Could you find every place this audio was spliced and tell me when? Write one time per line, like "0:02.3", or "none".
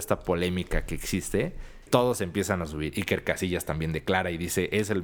0:01.9